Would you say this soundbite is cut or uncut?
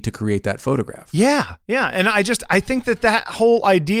cut